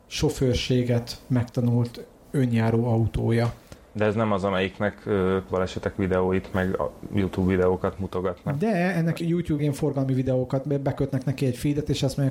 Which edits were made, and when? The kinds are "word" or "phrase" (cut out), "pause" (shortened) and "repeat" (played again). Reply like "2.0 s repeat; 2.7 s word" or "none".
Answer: 5.5 s word; 9.2 s word; 9.6 s phrase